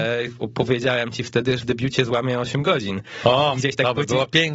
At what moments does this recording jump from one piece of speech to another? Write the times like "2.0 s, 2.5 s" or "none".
1.6 s